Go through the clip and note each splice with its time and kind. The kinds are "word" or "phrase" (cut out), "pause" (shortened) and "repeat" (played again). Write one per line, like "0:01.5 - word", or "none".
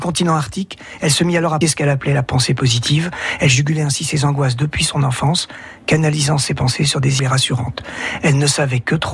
0:01.6 - word
0:07.2 - phrase

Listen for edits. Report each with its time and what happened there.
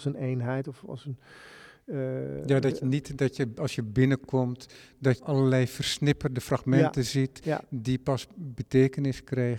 0:05.2 - word

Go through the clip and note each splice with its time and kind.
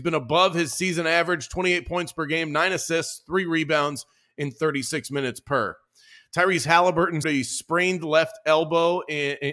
0:07.2 - word

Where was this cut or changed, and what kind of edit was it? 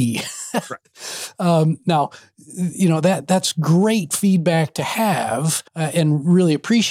0:05.7 - pause

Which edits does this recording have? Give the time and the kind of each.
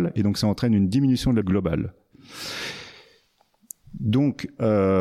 0:01.4 - word

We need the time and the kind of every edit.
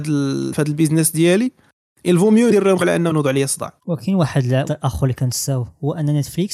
0:02.8 - word
0:03.8 - pause
0:04.6 - word

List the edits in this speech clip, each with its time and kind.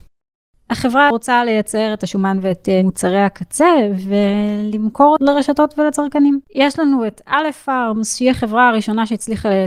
0:01.1 - word
0:05.2 - word
0:06.4 - pause

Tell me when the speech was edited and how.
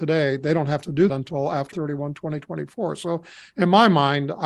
0:01.1 - word
0:01.7 - word

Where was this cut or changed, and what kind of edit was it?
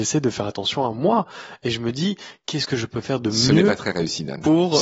none

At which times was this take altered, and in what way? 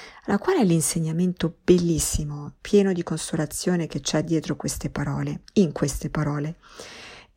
0:02.6 - pause

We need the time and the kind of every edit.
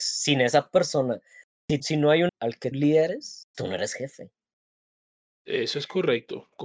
0:01.8 - word
0:02.3 - word
0:02.7 - word
0:03.5 - word

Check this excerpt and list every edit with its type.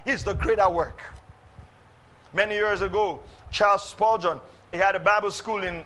0:03.4 - word
0:04.7 - word

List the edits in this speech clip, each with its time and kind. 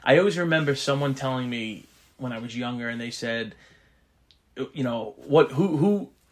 none

